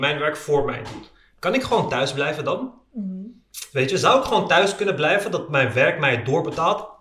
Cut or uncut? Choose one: uncut